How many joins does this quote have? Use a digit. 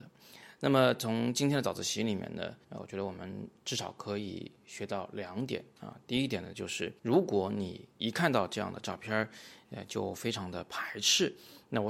2